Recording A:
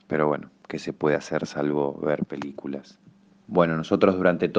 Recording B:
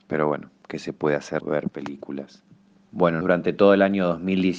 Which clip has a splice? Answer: B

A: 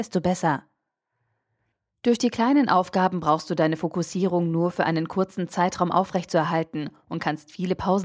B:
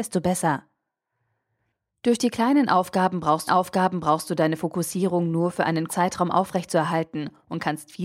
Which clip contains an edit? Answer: B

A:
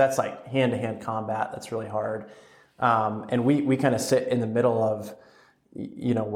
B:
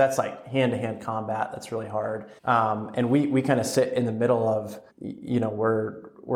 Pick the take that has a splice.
B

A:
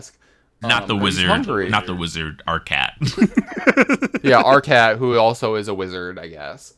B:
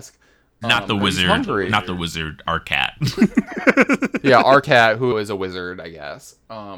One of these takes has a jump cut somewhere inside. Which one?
B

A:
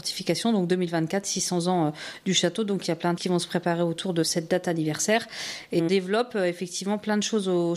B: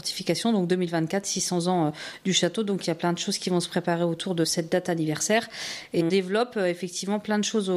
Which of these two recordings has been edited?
A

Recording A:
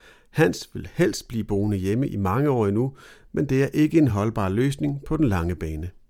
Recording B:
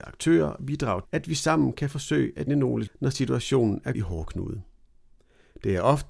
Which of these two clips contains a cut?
B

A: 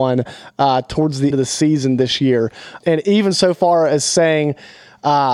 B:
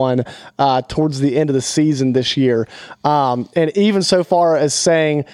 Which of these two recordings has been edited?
A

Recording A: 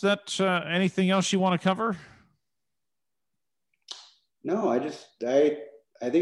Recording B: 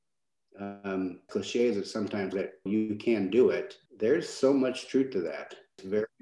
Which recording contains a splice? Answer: B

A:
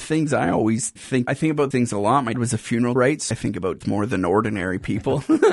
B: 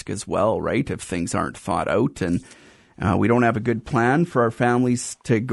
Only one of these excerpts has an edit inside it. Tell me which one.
A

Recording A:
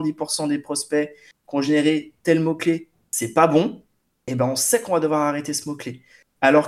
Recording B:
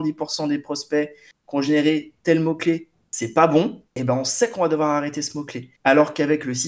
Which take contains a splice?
B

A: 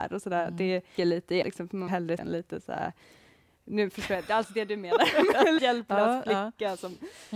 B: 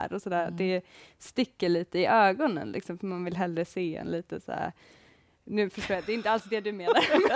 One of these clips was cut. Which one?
A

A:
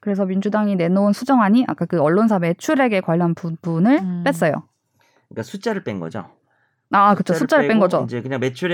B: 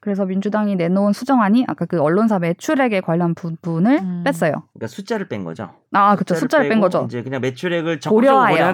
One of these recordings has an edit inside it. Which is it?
B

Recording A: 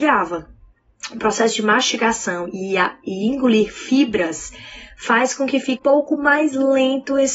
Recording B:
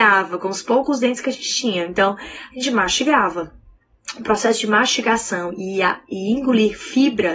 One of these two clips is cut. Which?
A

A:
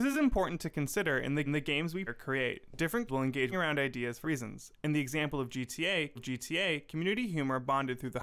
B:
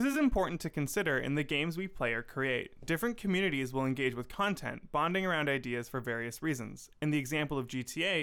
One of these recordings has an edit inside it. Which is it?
A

